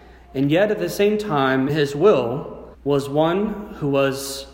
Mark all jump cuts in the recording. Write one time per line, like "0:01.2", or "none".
0:01.7
0:02.7